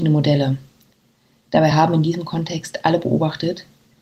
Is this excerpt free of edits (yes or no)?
yes